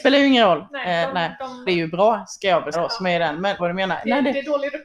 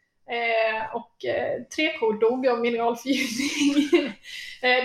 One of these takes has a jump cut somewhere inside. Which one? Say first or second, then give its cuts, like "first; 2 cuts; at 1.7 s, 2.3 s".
first; 3 cuts; at 1.7 s, 2.7 s, 3.6 s